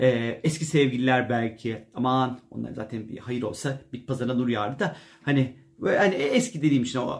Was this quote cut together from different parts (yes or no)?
no